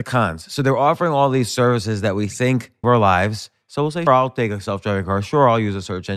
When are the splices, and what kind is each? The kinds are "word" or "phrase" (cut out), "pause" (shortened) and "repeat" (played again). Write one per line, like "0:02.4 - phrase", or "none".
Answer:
0:02.8 - word
0:04.1 - word